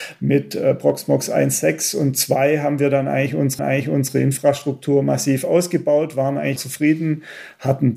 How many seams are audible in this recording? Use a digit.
2